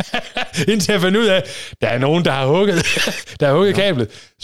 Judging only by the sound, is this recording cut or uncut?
uncut